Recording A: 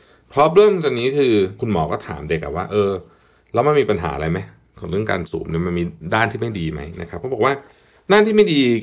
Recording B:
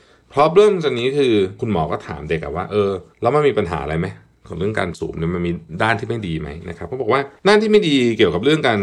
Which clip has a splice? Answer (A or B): B